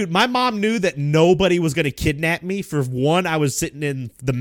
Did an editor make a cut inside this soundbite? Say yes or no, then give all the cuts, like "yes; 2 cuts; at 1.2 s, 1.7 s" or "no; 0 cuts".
no; 0 cuts